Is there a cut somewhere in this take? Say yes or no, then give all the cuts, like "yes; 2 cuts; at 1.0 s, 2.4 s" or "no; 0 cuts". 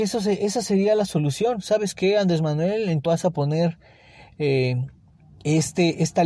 yes; 1 cut; at 3.1 s